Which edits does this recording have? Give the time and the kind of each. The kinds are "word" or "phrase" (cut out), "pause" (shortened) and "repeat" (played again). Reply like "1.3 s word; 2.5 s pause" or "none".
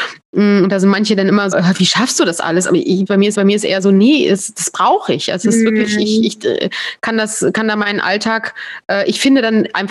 1.5 s word; 3.3 s repeat